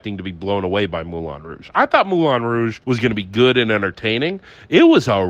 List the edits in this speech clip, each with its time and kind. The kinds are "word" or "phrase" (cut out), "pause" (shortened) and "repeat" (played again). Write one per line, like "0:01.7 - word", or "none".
0:02.8 - pause